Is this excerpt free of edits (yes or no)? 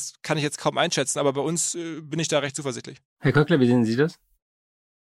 no